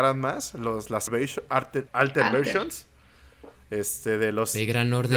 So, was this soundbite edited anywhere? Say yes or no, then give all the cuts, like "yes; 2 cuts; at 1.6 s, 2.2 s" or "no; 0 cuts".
yes; 2 cuts; at 1.1 s, 1.9 s